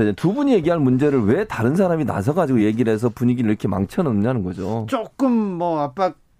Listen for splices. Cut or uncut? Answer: uncut